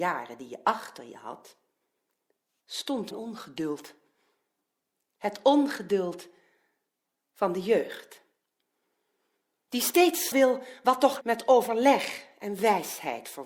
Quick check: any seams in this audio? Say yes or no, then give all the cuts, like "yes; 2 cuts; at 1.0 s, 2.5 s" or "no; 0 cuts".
yes; 3 cuts; at 3.1 s, 10.3 s, 11.2 s